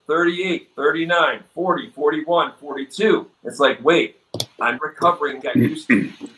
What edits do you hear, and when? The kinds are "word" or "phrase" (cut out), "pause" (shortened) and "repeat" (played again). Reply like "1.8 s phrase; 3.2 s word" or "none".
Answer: 3.3 s pause; 4.8 s word; 5.4 s word